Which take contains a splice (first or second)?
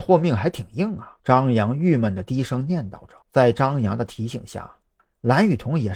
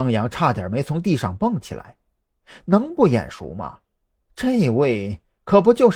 first